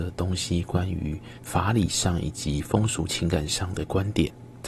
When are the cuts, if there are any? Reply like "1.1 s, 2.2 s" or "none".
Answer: 1.4 s

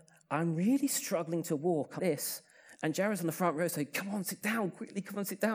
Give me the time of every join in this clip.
2.0 s

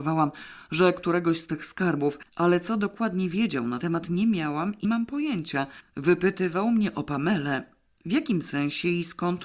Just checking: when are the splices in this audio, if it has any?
3.8 s, 4.8 s

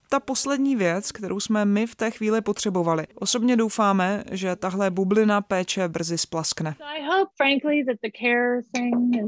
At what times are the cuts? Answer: 3.1 s, 7.3 s

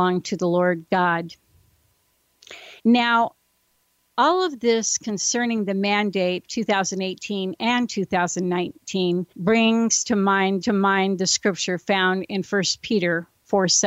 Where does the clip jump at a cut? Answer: 2.8 s, 6.5 s, 9.3 s, 10.6 s

